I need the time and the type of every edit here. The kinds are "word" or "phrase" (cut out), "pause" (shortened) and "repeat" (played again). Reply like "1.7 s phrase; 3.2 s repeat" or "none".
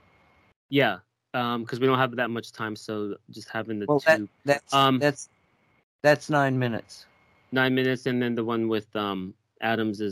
4.4 s word